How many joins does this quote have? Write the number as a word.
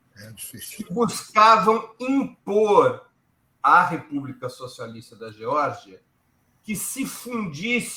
zero